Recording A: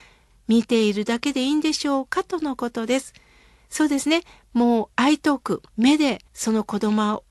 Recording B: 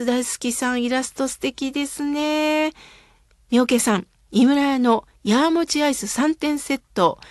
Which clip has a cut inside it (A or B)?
A